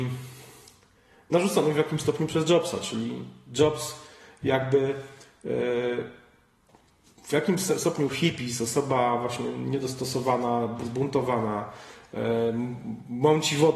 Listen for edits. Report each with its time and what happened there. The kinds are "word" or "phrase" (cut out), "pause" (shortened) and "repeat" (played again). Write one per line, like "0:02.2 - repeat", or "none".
none